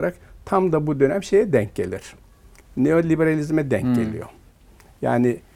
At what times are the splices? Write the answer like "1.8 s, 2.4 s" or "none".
none